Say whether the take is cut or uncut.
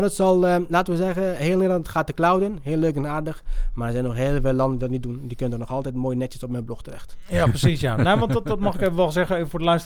uncut